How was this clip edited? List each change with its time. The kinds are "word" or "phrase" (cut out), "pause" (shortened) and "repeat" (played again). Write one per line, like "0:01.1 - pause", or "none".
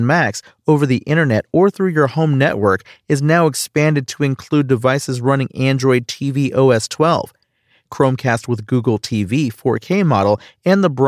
none